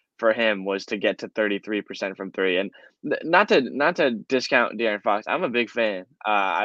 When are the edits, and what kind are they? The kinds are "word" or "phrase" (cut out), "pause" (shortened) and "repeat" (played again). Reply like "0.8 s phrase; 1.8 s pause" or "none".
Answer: none